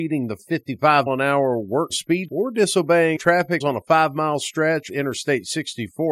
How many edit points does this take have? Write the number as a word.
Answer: six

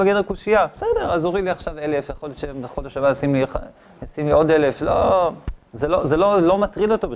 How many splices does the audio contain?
zero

